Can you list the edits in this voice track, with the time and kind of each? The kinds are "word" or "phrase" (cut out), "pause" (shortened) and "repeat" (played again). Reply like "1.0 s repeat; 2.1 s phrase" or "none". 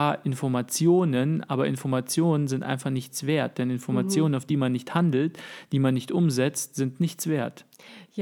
none

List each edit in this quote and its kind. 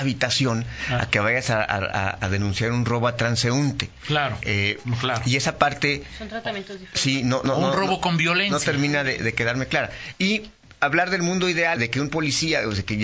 10.8 s pause; 11.8 s word

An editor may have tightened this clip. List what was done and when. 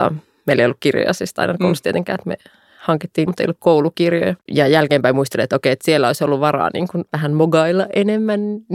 3.3 s phrase; 4.4 s pause; 7.1 s pause

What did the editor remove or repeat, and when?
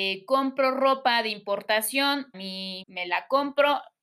2.3 s word; 2.8 s phrase

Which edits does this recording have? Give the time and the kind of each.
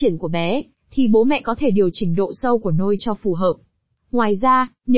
none

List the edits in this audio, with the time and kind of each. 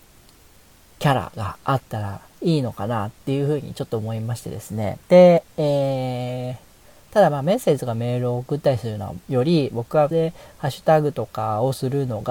2.3 s pause; 5.0 s pause; 9.2 s pause; 10.1 s word

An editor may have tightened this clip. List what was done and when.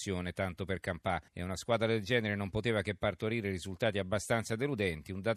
1.3 s pause

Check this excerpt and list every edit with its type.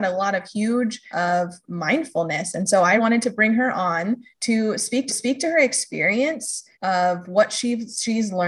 1.1 s phrase; 3.0 s word; 4.3 s pause; 5.1 s repeat; 6.7 s pause

